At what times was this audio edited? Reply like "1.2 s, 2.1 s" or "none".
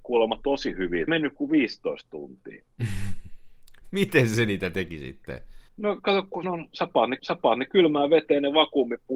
1.1 s, 5.7 s, 6.4 s, 7.2 s